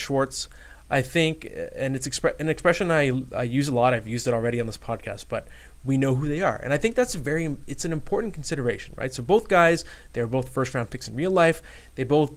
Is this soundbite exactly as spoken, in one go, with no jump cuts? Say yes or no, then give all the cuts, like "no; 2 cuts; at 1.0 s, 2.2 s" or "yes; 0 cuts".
yes; 0 cuts